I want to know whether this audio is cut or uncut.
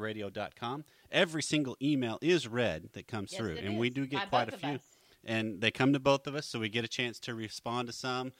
uncut